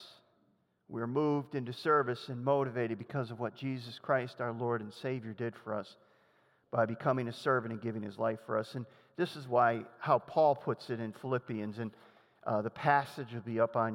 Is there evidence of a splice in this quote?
no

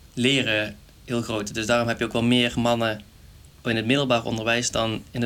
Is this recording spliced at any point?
no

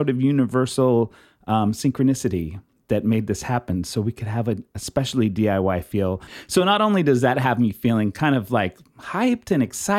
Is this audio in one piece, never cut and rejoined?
yes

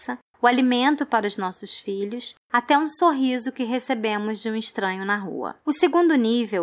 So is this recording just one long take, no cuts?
no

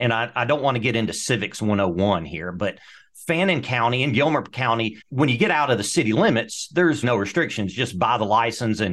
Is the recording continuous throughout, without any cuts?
no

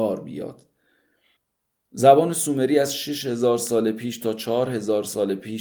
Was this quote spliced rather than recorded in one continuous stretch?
no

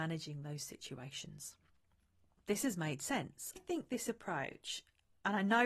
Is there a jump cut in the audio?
yes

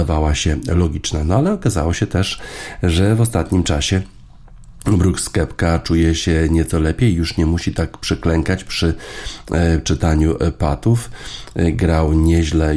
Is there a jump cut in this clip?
no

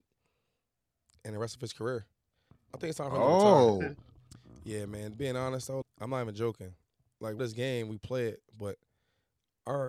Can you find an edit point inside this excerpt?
yes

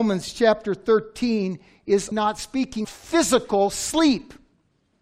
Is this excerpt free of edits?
no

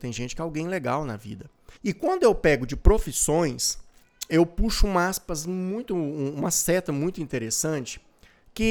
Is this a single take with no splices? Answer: no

